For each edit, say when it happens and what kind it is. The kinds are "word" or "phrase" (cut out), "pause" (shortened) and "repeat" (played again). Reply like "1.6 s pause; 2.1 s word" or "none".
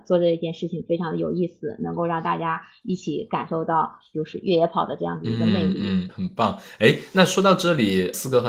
6.1 s word

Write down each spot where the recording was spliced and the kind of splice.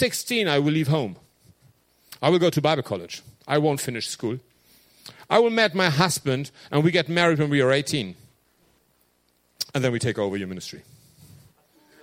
3.4 s pause; 9.7 s pause

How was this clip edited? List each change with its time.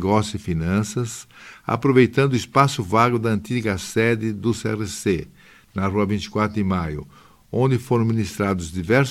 none

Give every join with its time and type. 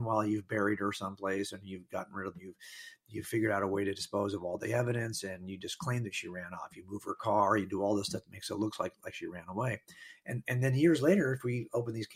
2.3 s phrase

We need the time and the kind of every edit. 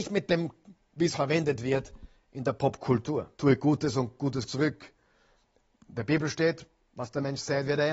1.1 s word; 3.3 s pause; 4.5 s word

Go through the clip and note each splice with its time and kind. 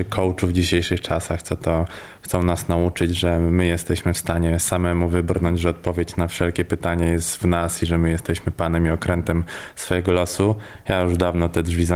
none

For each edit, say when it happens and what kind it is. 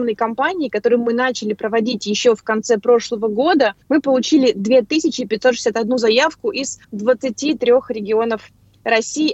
3.8 s pause; 6.8 s pause

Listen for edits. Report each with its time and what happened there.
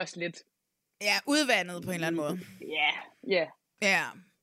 none

